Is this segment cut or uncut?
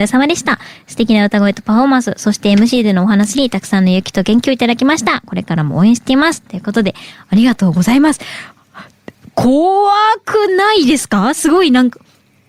uncut